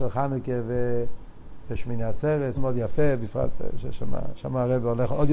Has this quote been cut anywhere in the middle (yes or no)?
yes